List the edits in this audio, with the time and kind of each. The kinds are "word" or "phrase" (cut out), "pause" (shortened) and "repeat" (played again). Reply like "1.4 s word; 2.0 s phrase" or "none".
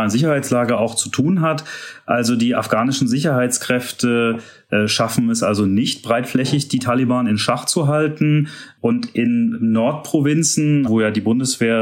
10.9 s word

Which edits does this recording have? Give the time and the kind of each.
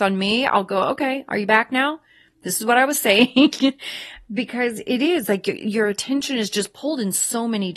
none

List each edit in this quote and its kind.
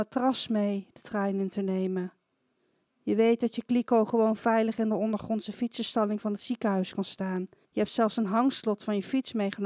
7.6 s pause

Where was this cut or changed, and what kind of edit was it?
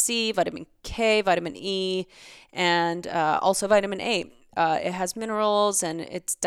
none

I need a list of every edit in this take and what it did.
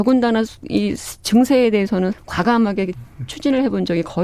2.1 s word

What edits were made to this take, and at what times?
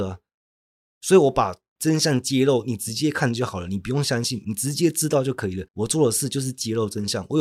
5.7 s pause

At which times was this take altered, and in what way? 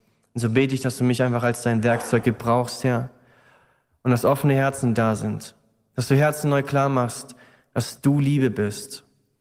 none

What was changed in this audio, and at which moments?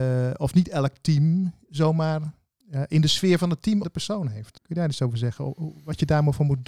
3.8 s phrase; 4.6 s pause

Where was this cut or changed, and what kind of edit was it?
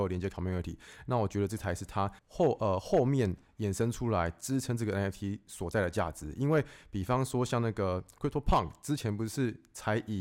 2.2 s pause

